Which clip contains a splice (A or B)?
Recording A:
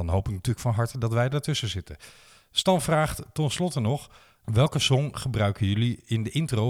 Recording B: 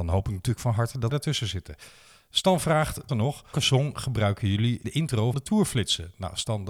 B